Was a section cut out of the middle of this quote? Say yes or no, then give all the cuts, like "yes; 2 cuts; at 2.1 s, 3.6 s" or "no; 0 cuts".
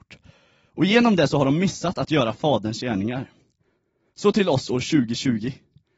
no; 0 cuts